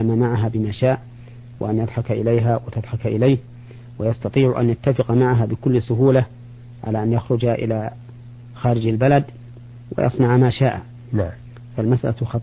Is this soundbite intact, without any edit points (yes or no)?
yes